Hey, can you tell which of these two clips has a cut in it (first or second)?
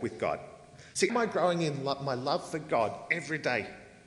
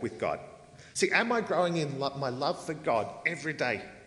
first